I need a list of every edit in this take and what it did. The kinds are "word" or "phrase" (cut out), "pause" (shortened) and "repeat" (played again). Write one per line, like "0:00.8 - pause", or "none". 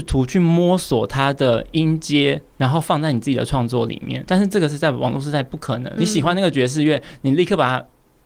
0:04.3 - word
0:06.0 - word